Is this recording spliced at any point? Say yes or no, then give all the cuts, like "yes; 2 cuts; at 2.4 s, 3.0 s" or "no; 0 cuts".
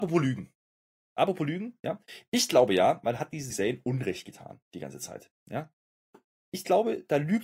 yes; 1 cut; at 3.5 s